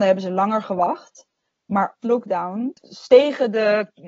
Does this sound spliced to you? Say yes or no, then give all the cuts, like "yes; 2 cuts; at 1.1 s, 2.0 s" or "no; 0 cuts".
yes; 1 cut; at 2.0 s